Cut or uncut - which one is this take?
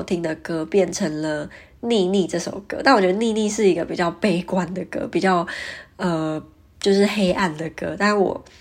uncut